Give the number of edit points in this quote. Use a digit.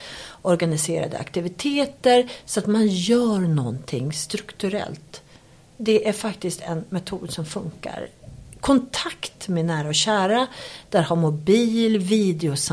0